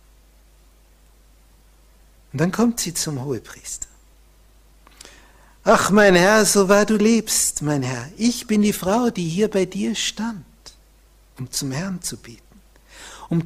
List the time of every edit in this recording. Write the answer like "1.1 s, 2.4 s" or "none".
none